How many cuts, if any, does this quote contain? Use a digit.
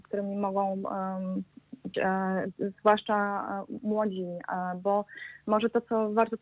1